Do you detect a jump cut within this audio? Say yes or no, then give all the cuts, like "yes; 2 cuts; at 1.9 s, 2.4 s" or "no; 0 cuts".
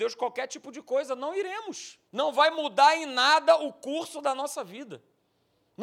yes; 1 cut; at 2.1 s